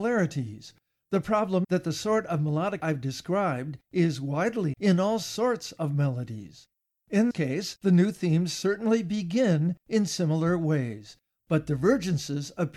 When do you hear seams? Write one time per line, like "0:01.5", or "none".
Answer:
0:01.6
0:02.8
0:04.7
0:07.3